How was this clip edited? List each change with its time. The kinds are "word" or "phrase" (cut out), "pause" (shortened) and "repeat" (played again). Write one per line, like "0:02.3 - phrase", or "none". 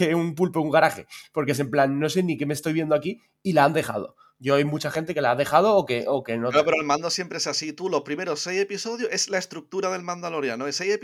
none